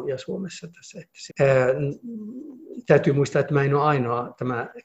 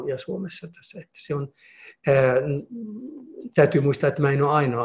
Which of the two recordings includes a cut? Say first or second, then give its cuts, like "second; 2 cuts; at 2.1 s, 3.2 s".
first; 1 cut; at 1.3 s